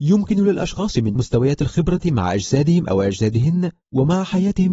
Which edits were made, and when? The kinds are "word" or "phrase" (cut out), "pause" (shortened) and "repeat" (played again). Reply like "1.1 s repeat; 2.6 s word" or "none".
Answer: 1.2 s word; 2.0 s word